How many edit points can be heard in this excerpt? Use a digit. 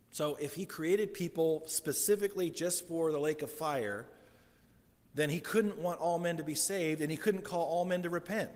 0